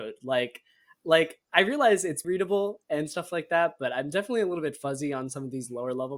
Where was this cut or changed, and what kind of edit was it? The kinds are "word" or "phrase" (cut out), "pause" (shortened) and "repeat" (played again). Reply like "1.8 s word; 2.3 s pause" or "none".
2.2 s word